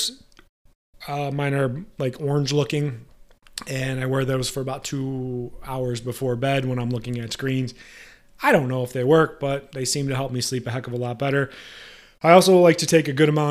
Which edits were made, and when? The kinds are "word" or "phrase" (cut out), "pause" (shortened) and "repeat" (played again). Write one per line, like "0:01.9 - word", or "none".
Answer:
none